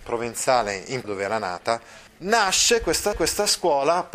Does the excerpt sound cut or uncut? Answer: cut